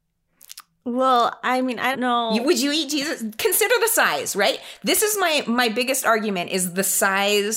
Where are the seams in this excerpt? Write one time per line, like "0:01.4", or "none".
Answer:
0:01.9